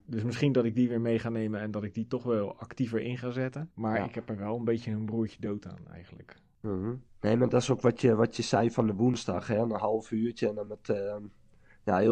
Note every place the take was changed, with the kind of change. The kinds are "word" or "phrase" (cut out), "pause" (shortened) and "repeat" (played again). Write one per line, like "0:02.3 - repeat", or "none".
none

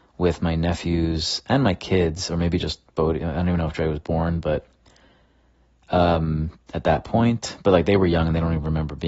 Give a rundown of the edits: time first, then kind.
none

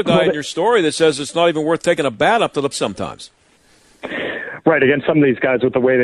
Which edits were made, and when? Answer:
0:02.7 - word

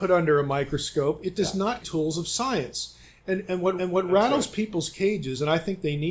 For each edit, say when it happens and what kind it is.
0:01.8 - phrase
0:03.8 - repeat

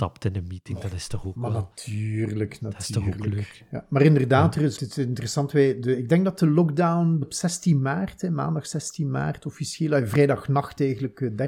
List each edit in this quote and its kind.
0:04.8 - phrase
0:07.2 - word

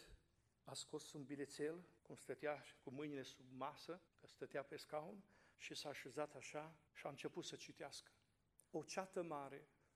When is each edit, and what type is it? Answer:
0:02.0 - pause
0:04.1 - pause
0:05.5 - pause
0:06.9 - pause
0:08.7 - pause

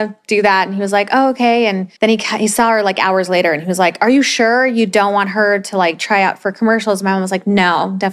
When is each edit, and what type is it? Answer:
0:02.0 - pause

